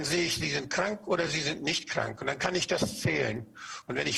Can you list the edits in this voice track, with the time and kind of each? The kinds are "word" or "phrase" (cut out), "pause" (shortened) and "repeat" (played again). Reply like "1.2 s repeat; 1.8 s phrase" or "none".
none